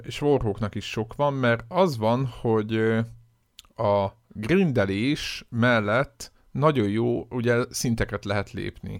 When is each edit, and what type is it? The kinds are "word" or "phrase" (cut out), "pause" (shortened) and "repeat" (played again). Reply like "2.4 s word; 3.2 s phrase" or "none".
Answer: none